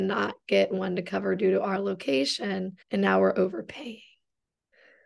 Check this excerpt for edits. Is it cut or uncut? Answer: cut